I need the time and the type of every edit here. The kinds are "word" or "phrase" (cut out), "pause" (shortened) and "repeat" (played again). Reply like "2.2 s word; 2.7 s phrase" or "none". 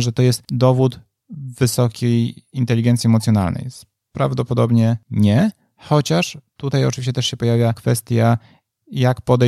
none

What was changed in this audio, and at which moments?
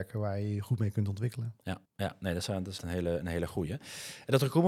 1.8 s pause; 2.8 s word

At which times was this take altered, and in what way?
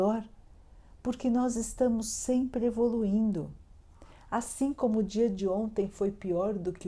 none

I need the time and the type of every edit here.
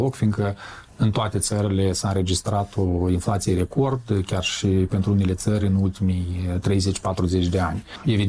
none

